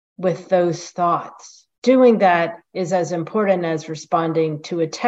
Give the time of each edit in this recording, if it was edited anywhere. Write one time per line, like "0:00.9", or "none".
0:01.7

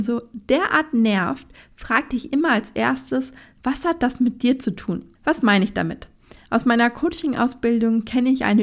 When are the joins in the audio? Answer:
0:05.1

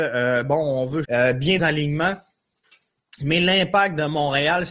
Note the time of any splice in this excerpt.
0:01.0
0:01.6

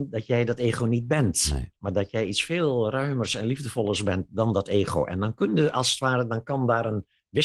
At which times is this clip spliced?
0:01.8

